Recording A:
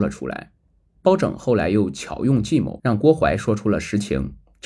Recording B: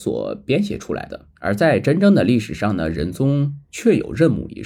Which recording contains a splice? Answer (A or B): B